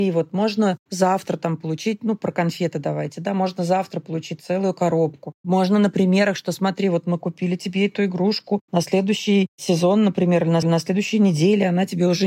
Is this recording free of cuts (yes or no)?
no